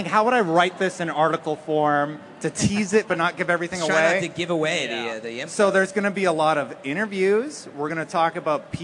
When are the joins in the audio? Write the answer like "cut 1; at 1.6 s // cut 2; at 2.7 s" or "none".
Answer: none

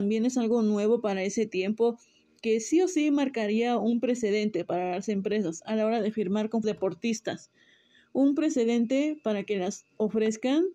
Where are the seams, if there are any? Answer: cut 1; at 6.6 s

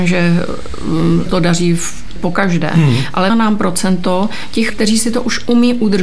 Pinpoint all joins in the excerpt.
cut 1; at 1.3 s // cut 2; at 2.2 s // cut 3; at 3.3 s // cut 4; at 4.7 s

